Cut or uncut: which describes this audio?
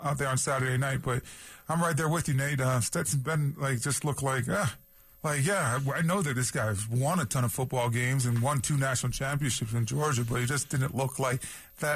cut